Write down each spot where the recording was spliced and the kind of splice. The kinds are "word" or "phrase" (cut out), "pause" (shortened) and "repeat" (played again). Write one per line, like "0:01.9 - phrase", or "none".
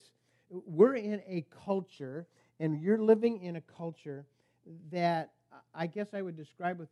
none